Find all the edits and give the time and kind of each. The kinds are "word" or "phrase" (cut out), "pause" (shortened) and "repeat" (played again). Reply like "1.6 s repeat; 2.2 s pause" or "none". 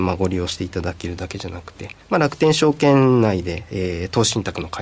2.0 s pause